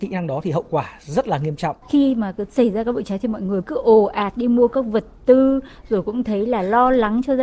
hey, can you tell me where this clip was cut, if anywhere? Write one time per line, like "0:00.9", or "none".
0:01.8
0:03.6